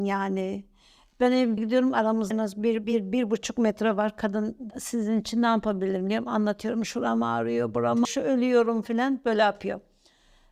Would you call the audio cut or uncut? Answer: cut